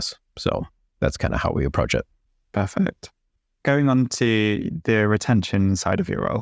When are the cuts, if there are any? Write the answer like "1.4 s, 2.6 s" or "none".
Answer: none